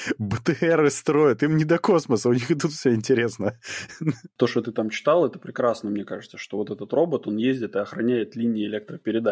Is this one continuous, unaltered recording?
yes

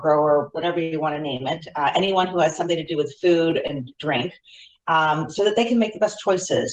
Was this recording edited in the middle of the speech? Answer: no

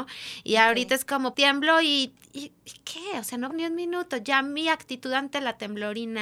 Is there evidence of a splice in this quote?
yes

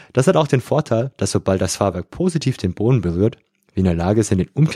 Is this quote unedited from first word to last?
yes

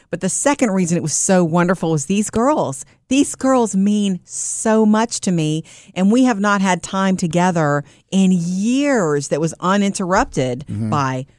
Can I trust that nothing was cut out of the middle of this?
yes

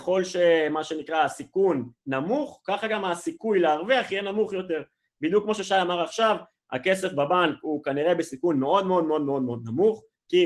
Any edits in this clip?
no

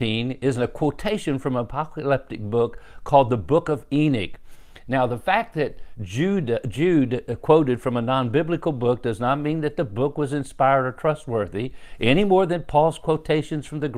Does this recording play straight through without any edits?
yes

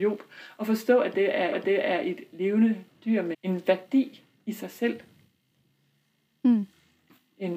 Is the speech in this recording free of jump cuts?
no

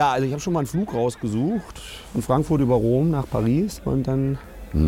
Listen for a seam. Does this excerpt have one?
no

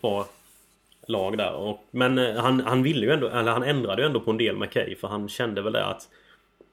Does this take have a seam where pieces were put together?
no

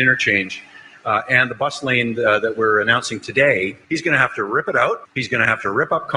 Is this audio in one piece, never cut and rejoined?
no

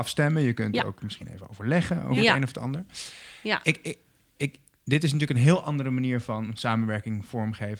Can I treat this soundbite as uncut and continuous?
yes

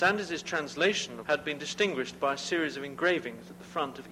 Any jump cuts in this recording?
yes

